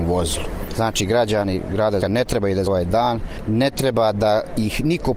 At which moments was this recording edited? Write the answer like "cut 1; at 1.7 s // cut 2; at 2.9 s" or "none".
cut 1; at 2.0 s // cut 2; at 2.7 s